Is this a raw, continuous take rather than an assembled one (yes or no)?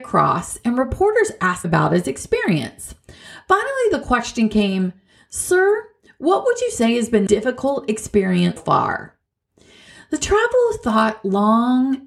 no